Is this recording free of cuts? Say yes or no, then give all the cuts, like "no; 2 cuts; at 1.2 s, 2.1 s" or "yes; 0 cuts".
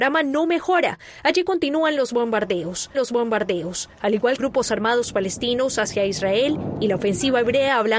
no; 2 cuts; at 2.9 s, 4.4 s